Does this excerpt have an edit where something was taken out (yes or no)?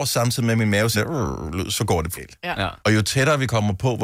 yes